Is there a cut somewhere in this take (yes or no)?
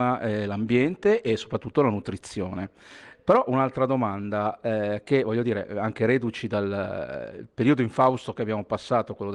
no